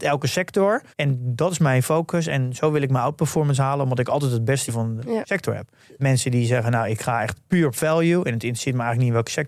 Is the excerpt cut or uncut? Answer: cut